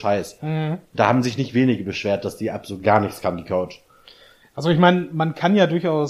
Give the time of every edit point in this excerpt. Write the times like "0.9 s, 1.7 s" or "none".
none